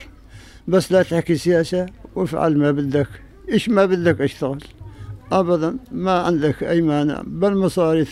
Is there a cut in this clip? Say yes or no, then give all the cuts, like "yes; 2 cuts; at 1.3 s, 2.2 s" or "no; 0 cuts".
no; 0 cuts